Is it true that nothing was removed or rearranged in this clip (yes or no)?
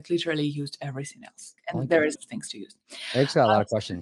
no